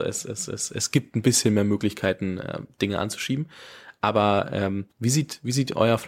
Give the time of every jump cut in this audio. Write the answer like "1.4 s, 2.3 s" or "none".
4.9 s